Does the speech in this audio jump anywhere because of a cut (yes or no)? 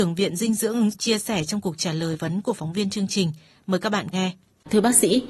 yes